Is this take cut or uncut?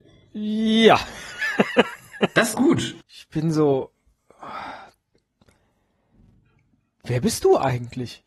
cut